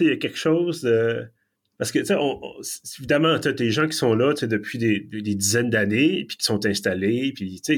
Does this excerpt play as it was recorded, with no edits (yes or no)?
no